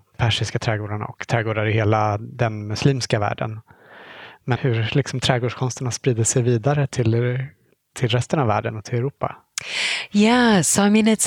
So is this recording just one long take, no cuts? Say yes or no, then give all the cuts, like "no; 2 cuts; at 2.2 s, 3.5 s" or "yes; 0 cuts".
no; 1 cut; at 4.6 s